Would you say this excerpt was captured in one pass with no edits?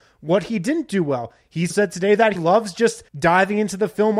no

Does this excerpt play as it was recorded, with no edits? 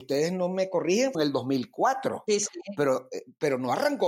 no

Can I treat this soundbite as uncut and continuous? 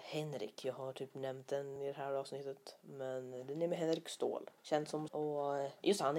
no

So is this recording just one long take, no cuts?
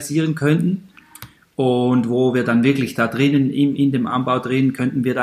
yes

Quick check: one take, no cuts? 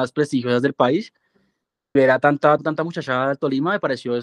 no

